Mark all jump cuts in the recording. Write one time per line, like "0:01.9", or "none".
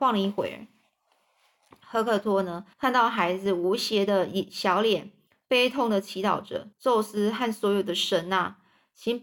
0:02.7
0:05.3
0:06.7